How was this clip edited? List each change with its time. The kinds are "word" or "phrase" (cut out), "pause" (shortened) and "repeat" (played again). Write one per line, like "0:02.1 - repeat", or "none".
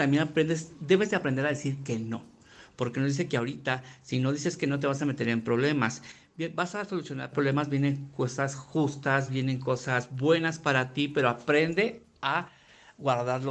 none